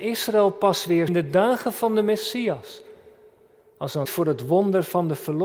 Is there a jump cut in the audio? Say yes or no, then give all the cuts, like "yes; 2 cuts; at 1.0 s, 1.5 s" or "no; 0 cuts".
yes; 2 cuts; at 1.1 s, 4.0 s